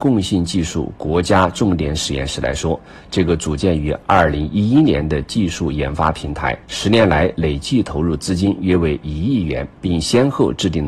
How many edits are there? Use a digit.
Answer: 2